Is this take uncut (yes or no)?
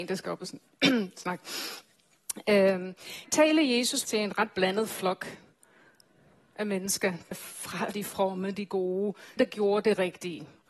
no